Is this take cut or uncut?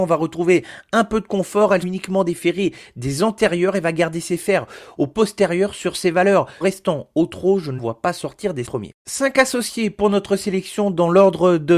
cut